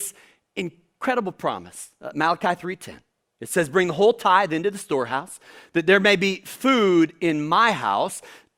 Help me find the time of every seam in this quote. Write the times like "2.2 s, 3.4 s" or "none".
none